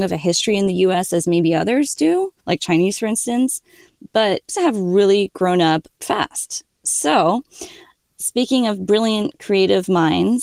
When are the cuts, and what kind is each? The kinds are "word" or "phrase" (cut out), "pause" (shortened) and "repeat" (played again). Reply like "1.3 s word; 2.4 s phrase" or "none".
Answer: 2.4 s pause; 4.5 s phrase; 6.0 s word